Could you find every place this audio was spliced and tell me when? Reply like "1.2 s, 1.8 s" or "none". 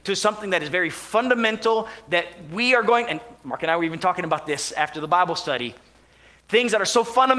none